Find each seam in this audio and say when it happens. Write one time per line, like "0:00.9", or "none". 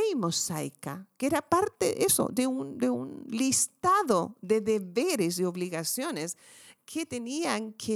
none